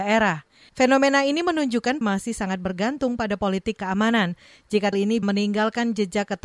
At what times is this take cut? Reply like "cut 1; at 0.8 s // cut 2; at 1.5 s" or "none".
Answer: cut 1; at 2.0 s // cut 2; at 3.8 s // cut 3; at 4.9 s // cut 4; at 5.2 s